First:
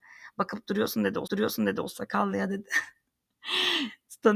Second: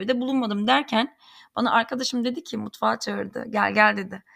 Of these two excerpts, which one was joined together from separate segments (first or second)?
first